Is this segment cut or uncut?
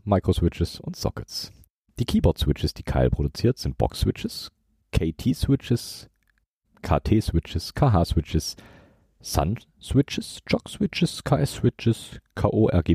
uncut